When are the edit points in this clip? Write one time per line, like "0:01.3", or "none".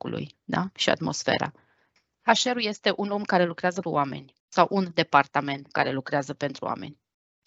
0:03.8